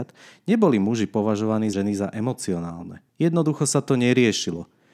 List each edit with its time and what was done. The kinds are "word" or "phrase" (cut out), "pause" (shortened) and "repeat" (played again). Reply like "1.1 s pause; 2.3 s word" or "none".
1.7 s phrase; 3.1 s pause